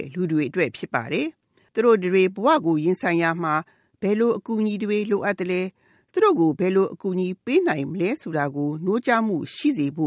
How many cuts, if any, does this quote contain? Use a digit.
0